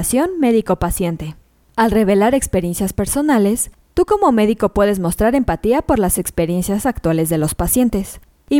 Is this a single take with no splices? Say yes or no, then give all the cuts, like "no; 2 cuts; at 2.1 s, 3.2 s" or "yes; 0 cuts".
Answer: yes; 0 cuts